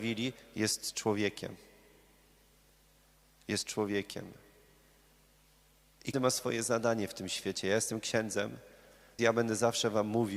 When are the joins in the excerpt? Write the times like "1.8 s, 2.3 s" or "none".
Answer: 6.1 s, 9.2 s